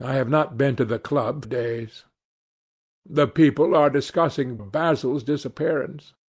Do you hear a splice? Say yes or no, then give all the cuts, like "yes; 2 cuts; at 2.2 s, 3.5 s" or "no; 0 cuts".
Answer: yes; 2 cuts; at 1.4 s, 4.6 s